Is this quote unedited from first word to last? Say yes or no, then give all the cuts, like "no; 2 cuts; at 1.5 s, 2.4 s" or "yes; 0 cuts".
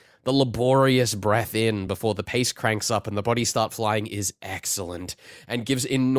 yes; 0 cuts